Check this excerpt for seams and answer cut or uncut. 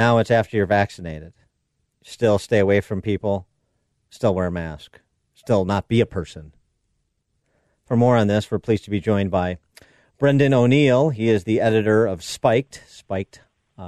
uncut